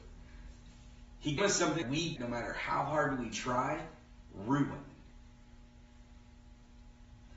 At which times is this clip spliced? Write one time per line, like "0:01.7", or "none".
0:01.4
0:01.8
0:02.2